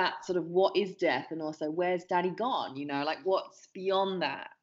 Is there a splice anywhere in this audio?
no; 0 cuts

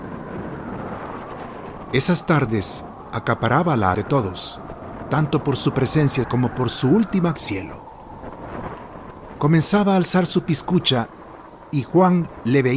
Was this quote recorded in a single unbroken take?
no; 3 cuts; at 3.9 s, 6.2 s, 7.4 s

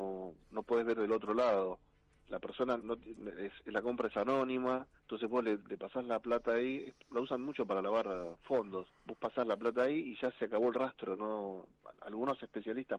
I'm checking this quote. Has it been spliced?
yes; 4 cuts; at 2.8 s, 5.0 s, 5.6 s, 9.0 s

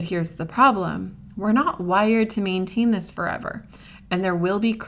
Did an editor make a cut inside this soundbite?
no; 0 cuts

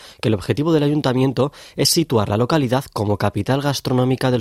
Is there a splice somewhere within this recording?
no; 0 cuts

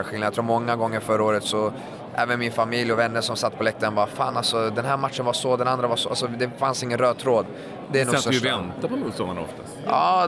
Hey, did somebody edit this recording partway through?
no; 0 cuts

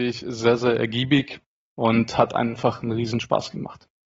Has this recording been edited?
no; 0 cuts

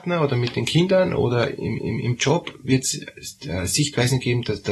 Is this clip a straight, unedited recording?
no; 1 cut; at 1.8 s

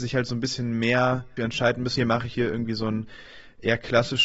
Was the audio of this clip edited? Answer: yes; 3 cuts; at 1.4 s, 2.0 s, 2.3 s

